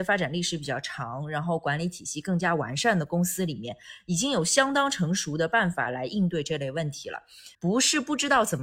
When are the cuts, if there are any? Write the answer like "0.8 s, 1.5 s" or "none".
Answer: 7.5 s